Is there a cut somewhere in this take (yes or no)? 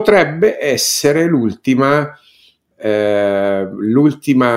no